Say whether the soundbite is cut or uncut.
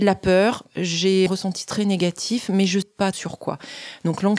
cut